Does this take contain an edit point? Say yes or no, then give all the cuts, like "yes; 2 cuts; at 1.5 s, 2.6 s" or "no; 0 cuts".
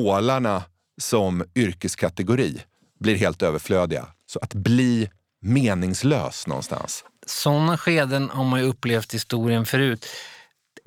no; 0 cuts